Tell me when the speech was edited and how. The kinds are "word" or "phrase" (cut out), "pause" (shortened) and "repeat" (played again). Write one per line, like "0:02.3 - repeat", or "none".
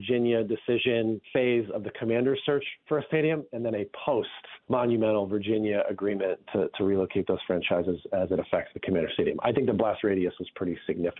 0:01.2 - pause
0:04.6 - pause